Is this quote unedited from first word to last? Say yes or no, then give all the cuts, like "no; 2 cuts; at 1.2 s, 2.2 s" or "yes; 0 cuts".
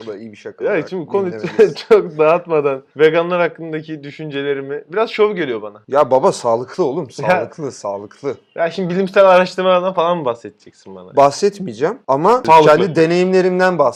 no; 1 cut; at 2.9 s